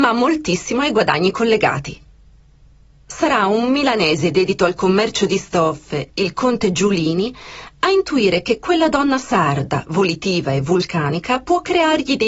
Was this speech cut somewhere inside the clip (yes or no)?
no